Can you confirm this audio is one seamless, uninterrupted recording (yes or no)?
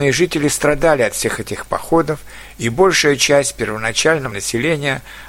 no